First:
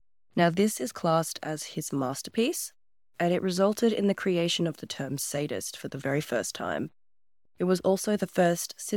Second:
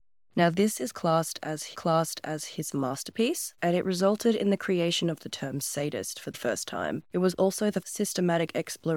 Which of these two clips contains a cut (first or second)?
second